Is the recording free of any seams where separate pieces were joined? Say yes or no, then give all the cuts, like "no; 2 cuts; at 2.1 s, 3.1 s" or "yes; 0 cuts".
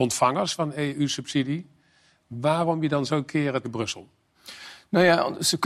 no; 1 cut; at 3.6 s